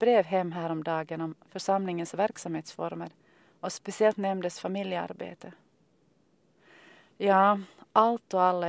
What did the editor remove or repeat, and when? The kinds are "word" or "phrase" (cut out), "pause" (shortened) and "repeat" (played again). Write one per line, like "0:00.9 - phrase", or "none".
none